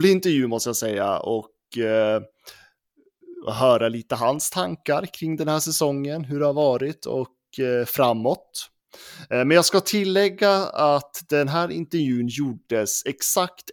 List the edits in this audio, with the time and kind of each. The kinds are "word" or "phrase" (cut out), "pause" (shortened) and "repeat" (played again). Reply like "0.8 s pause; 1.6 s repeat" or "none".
none